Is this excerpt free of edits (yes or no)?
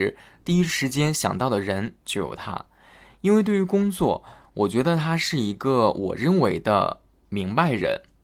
yes